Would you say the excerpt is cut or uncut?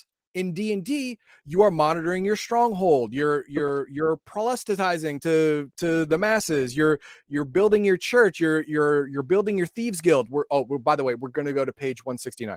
uncut